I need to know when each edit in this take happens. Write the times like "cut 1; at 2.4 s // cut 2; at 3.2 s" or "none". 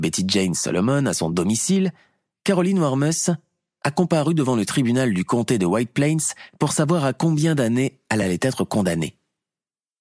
none